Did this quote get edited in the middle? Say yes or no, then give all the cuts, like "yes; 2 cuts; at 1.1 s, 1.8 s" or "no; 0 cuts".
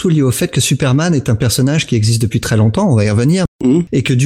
no; 0 cuts